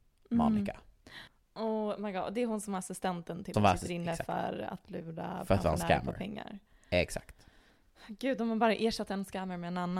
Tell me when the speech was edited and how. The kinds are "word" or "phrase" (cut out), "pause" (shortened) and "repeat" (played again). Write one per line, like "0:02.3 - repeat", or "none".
0:01.3 - pause
0:03.5 - word